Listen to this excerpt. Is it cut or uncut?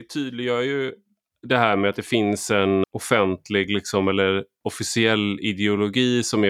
cut